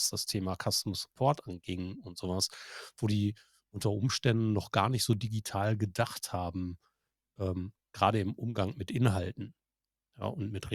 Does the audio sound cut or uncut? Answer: uncut